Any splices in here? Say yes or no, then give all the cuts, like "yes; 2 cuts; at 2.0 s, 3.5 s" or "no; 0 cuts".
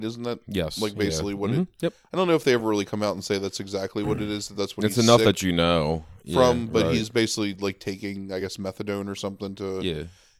no; 0 cuts